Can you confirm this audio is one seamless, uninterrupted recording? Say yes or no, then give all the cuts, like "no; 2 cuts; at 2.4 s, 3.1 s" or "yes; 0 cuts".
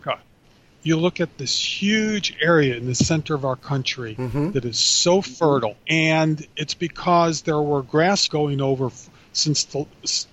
no; 2 cuts; at 5.8 s, 8.3 s